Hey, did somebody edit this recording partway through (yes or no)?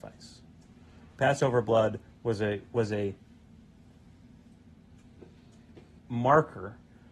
yes